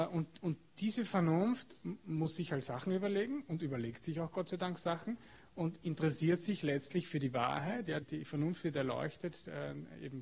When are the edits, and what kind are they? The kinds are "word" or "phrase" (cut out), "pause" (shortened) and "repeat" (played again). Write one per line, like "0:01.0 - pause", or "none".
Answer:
0:08.0 - word